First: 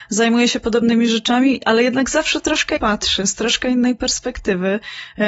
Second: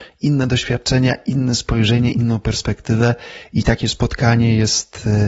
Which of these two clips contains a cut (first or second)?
first